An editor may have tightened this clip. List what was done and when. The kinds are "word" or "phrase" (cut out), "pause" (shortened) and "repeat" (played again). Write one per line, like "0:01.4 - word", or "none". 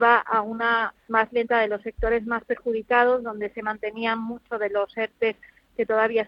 0:00.9 - phrase